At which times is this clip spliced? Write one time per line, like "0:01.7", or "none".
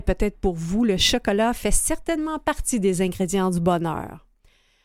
none